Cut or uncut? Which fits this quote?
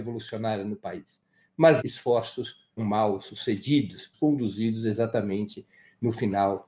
cut